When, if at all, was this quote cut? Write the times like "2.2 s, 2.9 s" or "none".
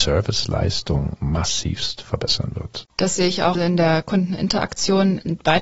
3.5 s